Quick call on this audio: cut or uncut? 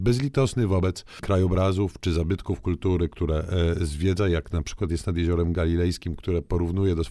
uncut